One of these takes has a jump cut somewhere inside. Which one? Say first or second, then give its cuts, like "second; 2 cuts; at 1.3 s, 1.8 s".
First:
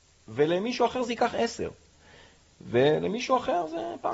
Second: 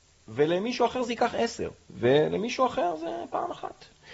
second; 1 cut; at 1.8 s